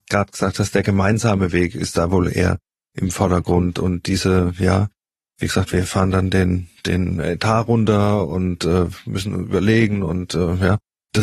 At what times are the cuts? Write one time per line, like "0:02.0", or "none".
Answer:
none